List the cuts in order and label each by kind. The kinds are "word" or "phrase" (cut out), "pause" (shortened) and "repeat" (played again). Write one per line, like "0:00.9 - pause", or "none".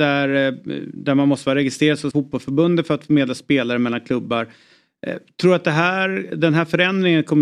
0:02.1 - word